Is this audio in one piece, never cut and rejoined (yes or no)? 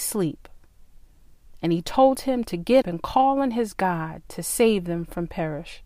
no